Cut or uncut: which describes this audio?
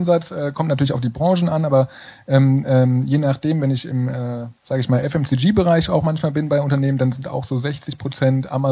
cut